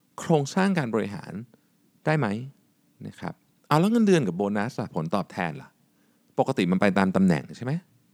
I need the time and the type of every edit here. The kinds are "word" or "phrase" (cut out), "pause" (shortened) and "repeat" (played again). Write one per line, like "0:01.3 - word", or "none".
none